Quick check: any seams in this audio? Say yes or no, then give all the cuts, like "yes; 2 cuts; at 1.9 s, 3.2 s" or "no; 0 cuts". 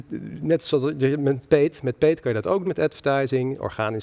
yes; 1 cut; at 2.7 s